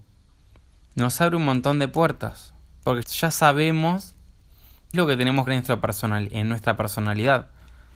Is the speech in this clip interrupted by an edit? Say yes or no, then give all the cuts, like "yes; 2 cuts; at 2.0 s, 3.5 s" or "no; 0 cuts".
yes; 3 cuts; at 3.0 s, 4.9 s, 5.5 s